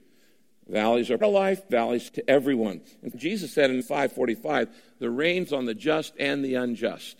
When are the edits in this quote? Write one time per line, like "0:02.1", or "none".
0:01.2
0:01.7
0:02.1
0:03.1
0:03.8
0:05.5